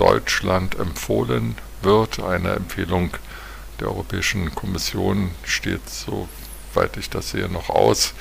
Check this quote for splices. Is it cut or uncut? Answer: uncut